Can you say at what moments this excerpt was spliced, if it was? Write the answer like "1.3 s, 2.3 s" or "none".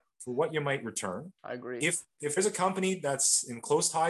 1.4 s, 2.4 s